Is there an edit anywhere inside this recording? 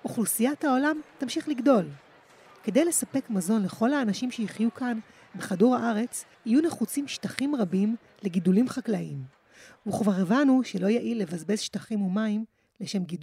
yes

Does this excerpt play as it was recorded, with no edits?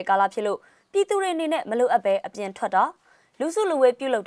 yes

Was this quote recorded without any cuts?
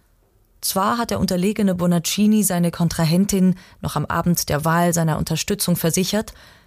yes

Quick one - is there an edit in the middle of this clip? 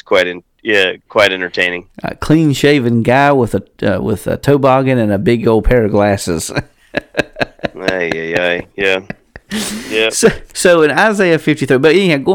yes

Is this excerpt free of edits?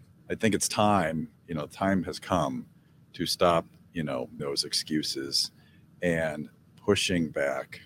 no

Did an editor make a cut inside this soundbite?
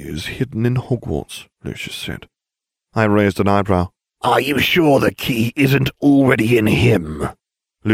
yes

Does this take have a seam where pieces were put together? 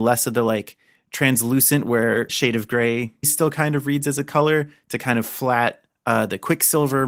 yes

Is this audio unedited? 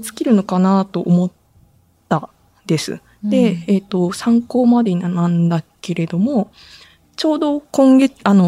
yes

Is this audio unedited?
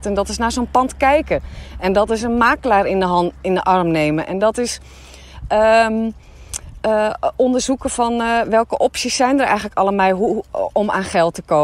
yes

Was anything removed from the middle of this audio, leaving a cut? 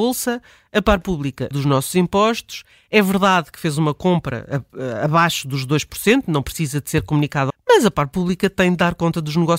yes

